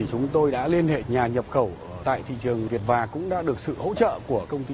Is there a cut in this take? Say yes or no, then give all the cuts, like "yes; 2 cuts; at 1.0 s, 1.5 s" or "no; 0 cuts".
yes; 2 cuts; at 1.0 s, 2.8 s